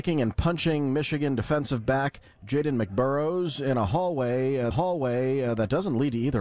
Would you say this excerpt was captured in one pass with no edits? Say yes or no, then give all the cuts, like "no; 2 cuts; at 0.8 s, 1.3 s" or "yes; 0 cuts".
no; 1 cut; at 4.7 s